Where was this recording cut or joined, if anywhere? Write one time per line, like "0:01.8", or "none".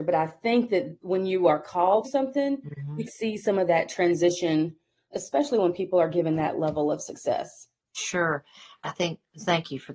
0:02.0
0:03.1
0:05.1
0:08.8